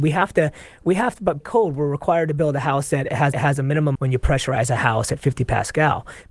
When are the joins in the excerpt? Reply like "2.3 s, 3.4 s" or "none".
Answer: 1.4 s, 3.3 s, 4.0 s